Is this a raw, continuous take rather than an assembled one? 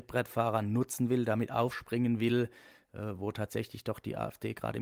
yes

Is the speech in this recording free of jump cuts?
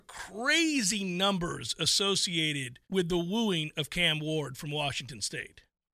no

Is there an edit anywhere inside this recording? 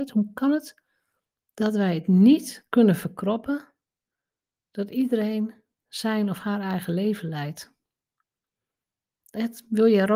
no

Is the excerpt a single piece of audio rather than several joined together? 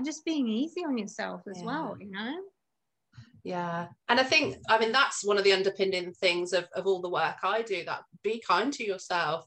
no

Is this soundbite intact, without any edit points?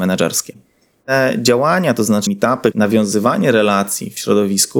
no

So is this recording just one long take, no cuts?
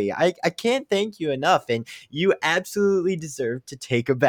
yes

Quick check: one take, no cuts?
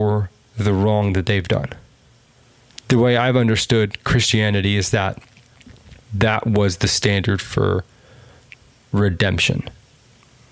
no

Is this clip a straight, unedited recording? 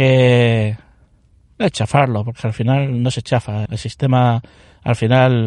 no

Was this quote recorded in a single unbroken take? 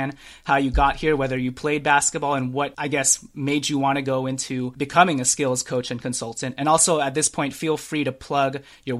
yes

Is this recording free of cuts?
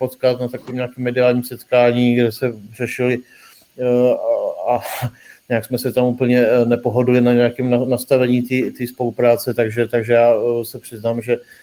yes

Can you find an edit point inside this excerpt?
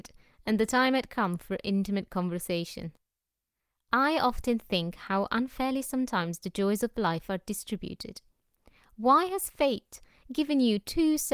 no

